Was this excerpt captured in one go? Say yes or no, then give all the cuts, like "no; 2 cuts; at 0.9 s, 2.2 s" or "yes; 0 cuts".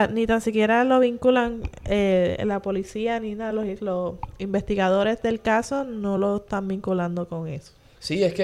yes; 0 cuts